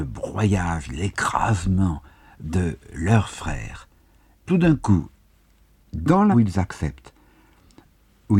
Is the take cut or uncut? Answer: cut